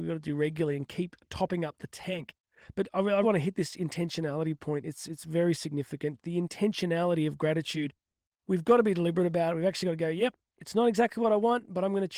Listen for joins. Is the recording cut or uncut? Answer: cut